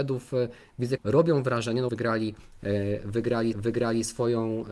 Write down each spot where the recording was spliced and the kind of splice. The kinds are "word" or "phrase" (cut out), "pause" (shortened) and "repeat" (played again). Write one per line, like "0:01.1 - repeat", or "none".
0:01.0 - word
0:01.9 - phrase
0:03.5 - repeat